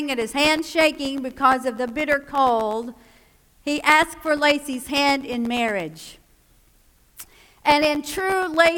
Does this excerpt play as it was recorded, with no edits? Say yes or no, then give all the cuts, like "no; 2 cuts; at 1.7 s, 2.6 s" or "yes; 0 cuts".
yes; 0 cuts